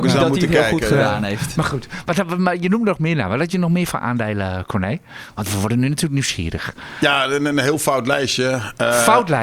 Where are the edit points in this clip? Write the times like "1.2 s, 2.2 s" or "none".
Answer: none